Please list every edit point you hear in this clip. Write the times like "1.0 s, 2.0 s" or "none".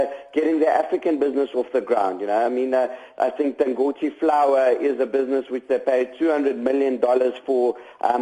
none